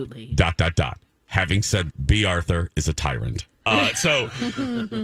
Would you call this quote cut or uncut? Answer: cut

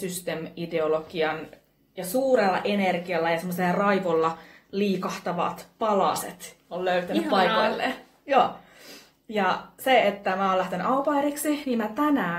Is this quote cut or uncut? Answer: uncut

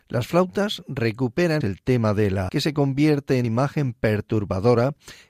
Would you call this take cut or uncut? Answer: cut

